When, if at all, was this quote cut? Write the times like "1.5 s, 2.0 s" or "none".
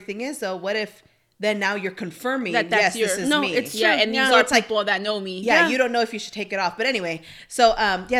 none

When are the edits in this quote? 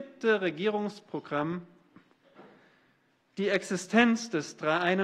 none

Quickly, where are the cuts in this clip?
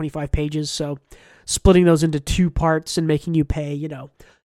none

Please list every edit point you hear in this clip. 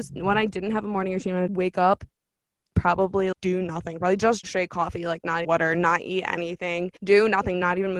1.5 s, 3.3 s, 4.4 s, 5.4 s, 7.0 s

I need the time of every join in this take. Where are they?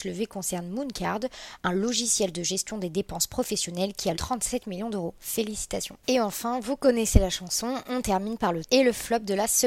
4.1 s, 6.0 s, 8.6 s

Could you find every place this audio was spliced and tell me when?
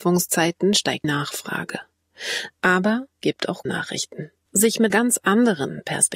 1.0 s, 3.2 s, 3.7 s, 4.9 s

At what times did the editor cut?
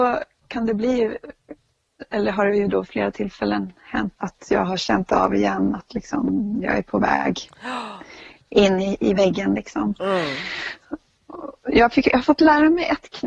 4.2 s

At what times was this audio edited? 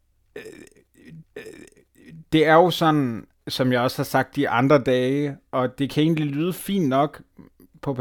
1.2 s, 3.3 s, 4.3 s, 5.4 s

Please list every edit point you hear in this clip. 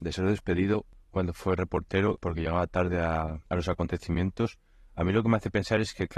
3.5 s

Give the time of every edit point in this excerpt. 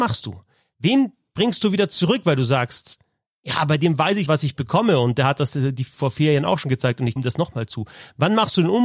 4.3 s, 7.2 s

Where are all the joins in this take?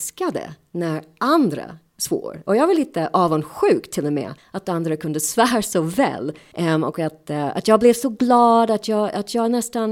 none

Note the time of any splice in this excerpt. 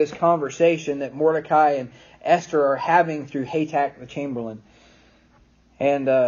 none

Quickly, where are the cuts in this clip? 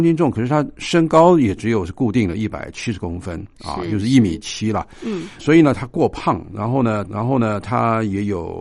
5.4 s, 7.0 s

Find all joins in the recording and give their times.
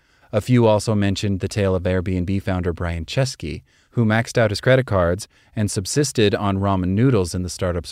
none

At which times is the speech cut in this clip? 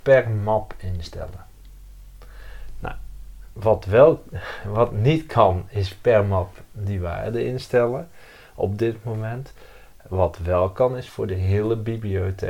none

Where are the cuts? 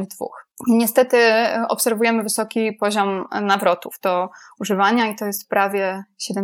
none

